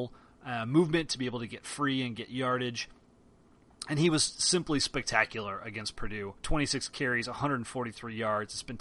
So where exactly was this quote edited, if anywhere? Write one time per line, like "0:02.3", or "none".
0:06.4